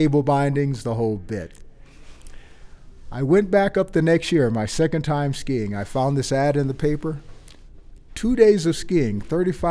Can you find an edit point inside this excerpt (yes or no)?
no